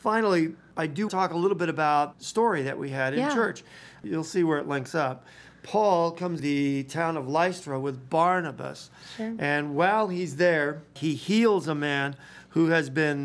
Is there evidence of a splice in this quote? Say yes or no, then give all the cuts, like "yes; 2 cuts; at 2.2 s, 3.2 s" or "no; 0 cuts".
yes; 3 cuts; at 1.1 s, 2.1 s, 6.4 s